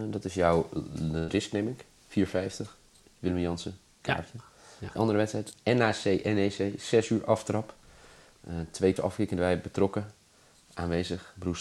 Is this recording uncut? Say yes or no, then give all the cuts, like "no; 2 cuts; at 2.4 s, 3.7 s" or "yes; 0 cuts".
no; 2 cuts; at 4.9 s, 9.0 s